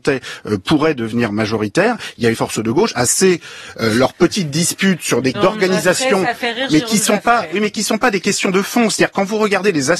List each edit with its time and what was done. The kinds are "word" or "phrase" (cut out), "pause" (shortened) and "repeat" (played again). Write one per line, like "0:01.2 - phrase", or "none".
0:02.3 - phrase
0:03.1 - word
0:05.3 - word